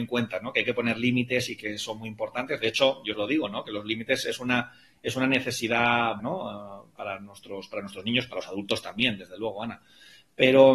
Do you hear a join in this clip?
yes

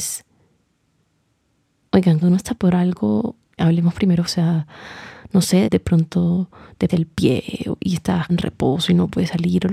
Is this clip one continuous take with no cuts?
no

